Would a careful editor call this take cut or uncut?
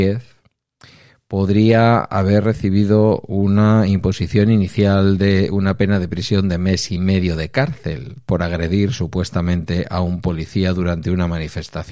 uncut